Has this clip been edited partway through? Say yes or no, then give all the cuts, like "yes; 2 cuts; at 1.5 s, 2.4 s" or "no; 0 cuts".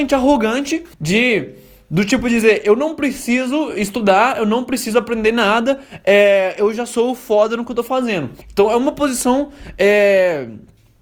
yes; 2 cuts; at 0.9 s, 8.4 s